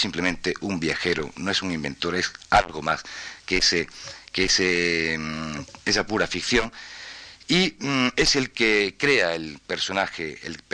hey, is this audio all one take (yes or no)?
yes